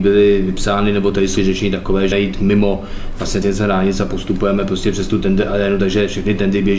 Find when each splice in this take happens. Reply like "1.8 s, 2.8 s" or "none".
1.4 s, 2.1 s, 3.4 s

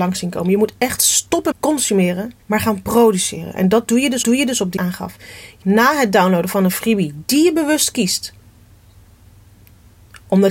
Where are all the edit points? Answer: 1.5 s, 2.4 s, 4.2 s, 4.8 s, 5.6 s

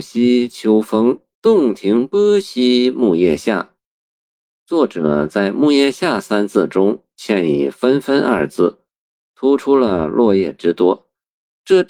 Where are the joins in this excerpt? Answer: 1.3 s

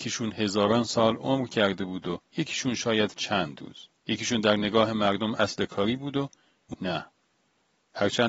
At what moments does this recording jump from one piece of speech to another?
2.3 s, 3.1 s, 4.0 s, 6.7 s

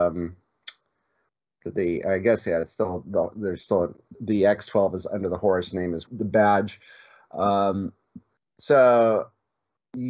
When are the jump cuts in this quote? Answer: 6.1 s

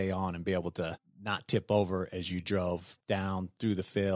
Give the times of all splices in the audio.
none

